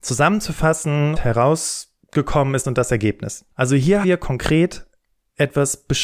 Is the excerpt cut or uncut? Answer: cut